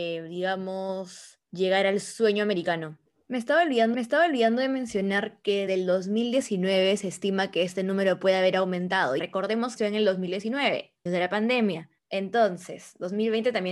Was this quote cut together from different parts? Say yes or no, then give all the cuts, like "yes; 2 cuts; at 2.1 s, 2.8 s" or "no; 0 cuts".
yes; 8 cuts; at 1.4 s, 3.1 s, 3.9 s, 5.7 s, 9.2 s, 9.8 s, 11.1 s, 12.0 s